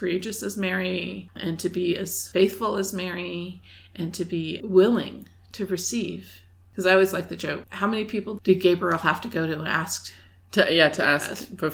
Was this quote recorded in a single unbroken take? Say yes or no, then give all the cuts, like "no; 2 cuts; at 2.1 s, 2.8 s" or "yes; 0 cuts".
yes; 0 cuts